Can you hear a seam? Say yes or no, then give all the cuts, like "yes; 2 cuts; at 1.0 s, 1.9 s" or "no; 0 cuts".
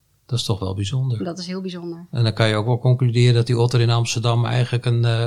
no; 0 cuts